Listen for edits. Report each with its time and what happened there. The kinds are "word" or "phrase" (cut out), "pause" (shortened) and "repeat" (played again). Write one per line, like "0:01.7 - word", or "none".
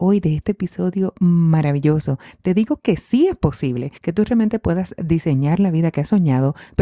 0:04.0 - pause